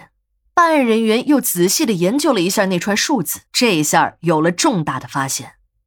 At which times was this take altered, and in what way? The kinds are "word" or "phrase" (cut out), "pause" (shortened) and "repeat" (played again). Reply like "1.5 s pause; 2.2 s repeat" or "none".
3.5 s pause